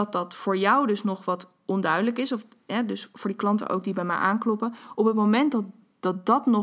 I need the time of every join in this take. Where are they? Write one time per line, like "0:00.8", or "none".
none